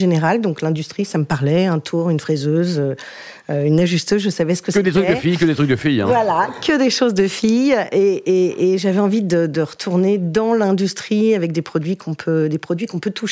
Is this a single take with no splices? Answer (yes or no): yes